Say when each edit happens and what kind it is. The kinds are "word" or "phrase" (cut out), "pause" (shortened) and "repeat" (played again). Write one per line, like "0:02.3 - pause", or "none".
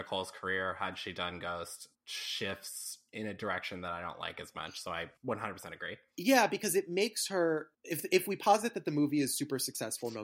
0:01.9 - pause
0:05.2 - pause
0:07.7 - pause